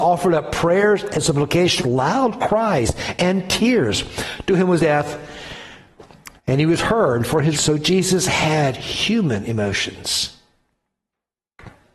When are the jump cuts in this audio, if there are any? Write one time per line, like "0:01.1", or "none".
0:01.8
0:04.8
0:06.4
0:07.5